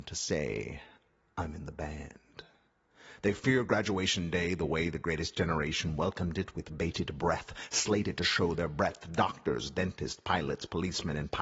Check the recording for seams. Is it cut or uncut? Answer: uncut